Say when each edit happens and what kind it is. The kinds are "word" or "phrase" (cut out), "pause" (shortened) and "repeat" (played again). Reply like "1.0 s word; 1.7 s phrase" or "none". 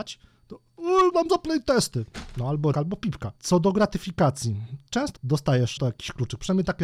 1.1 s phrase; 2.7 s word; 3.4 s pause; 5.2 s phrase; 5.8 s word